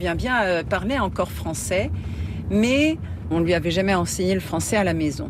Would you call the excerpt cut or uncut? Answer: uncut